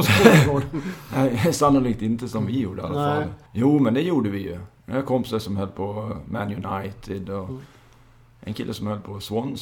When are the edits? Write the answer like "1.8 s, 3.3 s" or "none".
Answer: 3.5 s